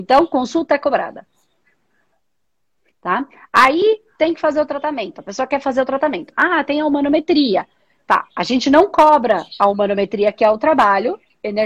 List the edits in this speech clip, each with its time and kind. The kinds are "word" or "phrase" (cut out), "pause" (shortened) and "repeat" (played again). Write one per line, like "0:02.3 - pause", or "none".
none